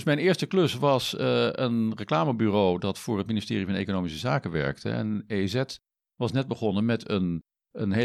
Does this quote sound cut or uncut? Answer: uncut